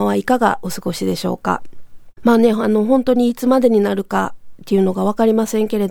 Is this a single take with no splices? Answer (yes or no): no